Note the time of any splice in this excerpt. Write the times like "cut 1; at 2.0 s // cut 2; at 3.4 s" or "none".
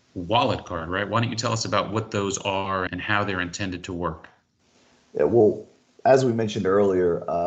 cut 1; at 2.9 s